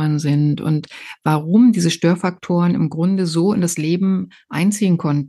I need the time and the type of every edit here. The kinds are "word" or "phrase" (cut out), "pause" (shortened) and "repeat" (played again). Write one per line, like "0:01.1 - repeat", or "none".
none